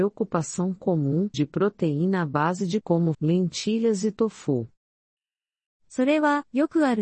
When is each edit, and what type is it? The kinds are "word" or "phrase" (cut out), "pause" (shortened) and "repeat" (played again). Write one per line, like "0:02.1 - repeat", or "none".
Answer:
0:01.3 - phrase
0:02.8 - word
0:03.1 - word